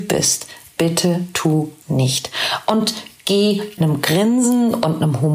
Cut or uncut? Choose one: cut